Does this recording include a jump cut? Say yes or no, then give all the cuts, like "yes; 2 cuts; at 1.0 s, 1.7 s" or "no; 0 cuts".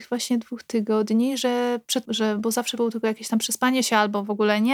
yes; 2 cuts; at 2.0 s, 2.8 s